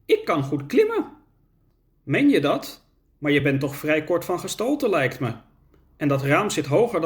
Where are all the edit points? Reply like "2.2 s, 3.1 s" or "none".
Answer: none